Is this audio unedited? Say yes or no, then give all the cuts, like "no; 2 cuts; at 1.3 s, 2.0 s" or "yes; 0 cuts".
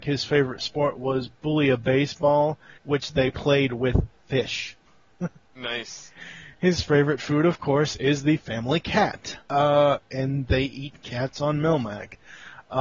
no; 3 cuts; at 2.8 s, 4.9 s, 9.4 s